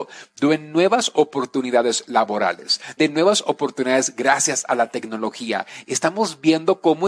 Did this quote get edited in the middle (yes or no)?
yes